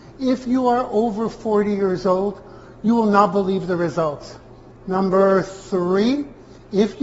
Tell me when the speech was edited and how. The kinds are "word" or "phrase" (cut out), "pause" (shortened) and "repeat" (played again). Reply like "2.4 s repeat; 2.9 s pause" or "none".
none